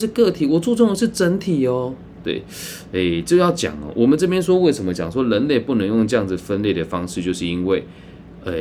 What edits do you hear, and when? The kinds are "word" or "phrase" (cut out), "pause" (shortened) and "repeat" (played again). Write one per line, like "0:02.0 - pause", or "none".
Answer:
none